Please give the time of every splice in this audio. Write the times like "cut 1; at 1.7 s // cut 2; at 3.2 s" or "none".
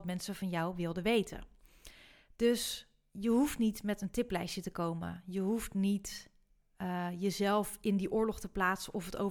none

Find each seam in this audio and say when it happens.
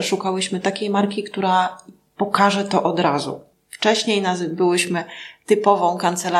none

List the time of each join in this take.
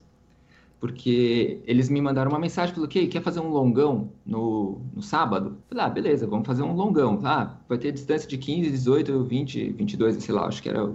cut 1; at 5.6 s

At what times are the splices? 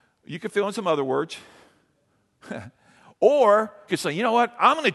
cut 1; at 3.9 s

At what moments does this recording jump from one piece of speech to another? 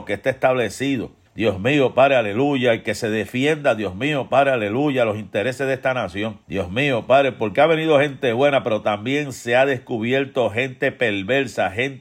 cut 1; at 1.3 s // cut 2; at 6.4 s

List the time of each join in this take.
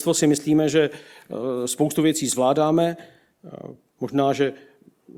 none

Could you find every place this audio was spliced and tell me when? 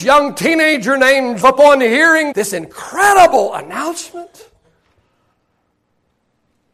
cut 1; at 1.4 s // cut 2; at 2.3 s

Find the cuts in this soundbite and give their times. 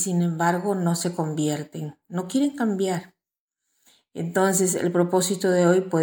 none

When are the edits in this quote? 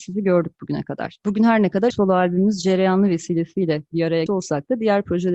cut 1; at 1.9 s // cut 2; at 4.3 s

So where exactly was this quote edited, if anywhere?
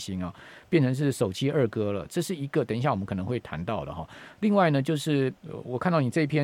cut 1; at 5.4 s

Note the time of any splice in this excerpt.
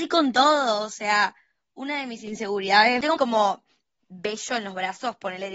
cut 1; at 3.2 s

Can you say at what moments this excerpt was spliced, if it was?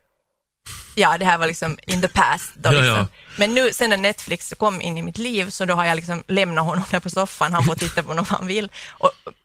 none

